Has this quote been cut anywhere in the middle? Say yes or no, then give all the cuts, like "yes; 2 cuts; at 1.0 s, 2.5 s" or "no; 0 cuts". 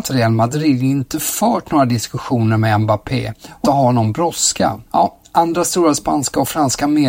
yes; 2 cuts; at 3.6 s, 4.9 s